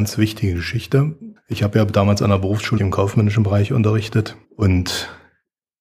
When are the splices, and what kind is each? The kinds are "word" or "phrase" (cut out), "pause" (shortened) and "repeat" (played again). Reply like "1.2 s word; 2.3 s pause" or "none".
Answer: 1.4 s word; 2.8 s word; 4.4 s pause